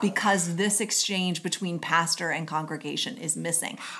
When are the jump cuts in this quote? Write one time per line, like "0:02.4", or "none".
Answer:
none